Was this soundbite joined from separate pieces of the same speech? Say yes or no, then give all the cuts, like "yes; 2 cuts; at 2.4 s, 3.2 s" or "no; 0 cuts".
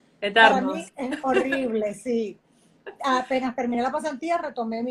no; 0 cuts